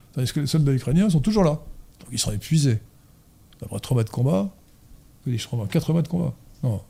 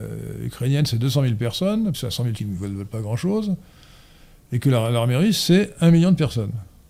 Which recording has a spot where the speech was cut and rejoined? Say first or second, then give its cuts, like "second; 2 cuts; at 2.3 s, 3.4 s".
second; 2 cuts; at 1.9 s, 2.4 s